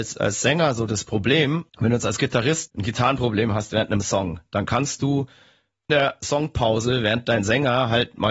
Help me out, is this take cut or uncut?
cut